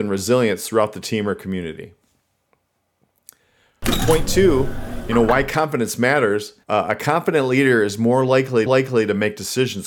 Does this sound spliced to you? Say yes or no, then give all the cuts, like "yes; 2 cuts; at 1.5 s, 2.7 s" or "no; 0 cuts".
yes; 2 cuts; at 6.6 s, 8.7 s